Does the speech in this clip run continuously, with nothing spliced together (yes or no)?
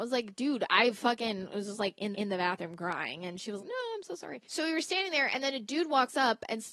no